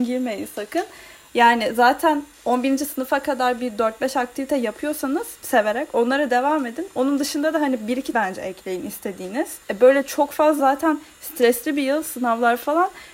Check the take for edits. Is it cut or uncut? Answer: cut